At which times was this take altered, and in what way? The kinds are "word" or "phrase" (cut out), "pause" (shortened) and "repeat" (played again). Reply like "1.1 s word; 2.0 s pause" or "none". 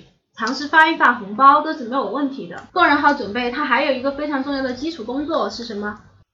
2.7 s pause